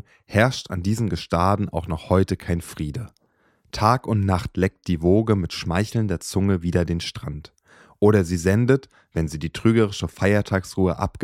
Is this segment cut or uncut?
uncut